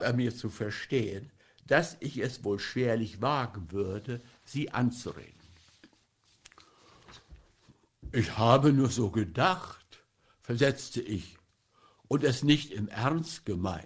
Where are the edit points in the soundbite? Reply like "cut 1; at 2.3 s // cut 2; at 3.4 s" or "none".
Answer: none